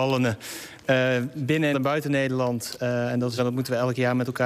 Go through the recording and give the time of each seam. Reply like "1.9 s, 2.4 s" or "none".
1.7 s, 3.4 s